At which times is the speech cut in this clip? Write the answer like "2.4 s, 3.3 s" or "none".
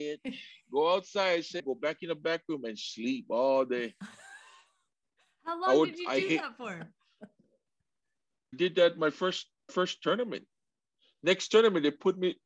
1.6 s, 8.5 s, 9.7 s